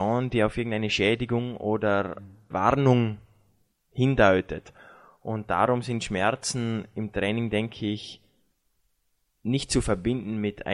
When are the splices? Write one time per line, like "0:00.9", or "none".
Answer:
0:02.5

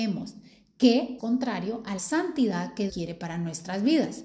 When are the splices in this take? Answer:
0:01.2
0:02.0
0:02.9

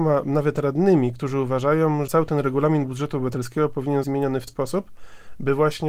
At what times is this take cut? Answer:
0:02.1
0:04.0
0:04.5

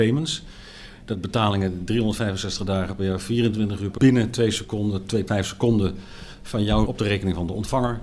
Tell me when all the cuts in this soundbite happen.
0:04.0
0:05.3
0:06.9

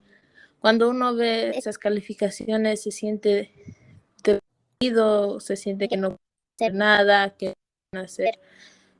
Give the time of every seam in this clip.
none

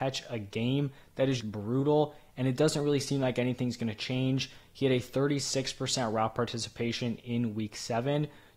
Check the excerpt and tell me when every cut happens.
0:01.4

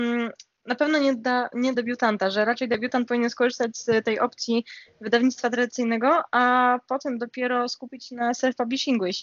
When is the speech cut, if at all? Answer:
0:01.7

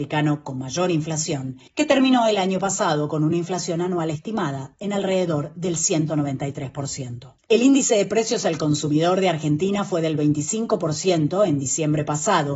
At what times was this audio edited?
none

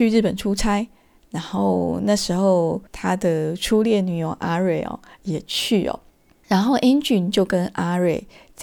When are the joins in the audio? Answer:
0:02.9

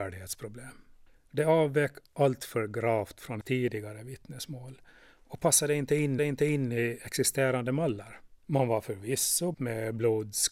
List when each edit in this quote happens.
0:01.1
0:03.4
0:06.2
0:08.4
0:09.5

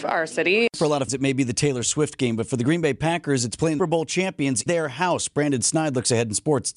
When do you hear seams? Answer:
0:01.1
0:03.8
0:04.7

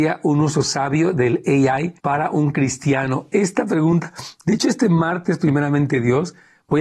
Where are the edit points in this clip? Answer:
0:02.0

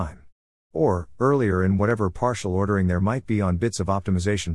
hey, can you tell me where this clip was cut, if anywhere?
none

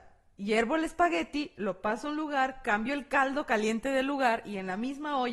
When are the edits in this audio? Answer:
none

